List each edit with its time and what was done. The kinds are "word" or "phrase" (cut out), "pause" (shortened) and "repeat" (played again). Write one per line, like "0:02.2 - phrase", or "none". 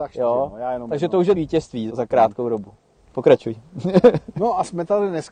0:01.4 - word
0:01.9 - word